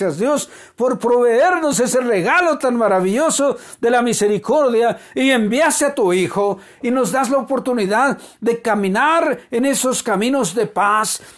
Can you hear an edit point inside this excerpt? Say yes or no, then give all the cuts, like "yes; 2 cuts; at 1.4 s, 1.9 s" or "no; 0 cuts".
no; 0 cuts